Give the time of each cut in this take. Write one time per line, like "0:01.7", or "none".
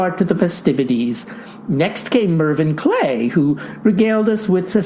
none